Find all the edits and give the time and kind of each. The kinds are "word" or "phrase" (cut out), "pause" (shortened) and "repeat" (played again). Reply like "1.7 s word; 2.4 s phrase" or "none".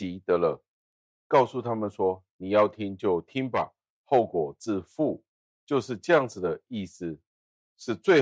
5.3 s pause